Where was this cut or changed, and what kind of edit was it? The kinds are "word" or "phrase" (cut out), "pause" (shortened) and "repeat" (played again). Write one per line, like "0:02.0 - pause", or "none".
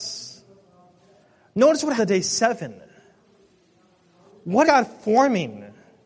0:02.0 - word
0:04.6 - word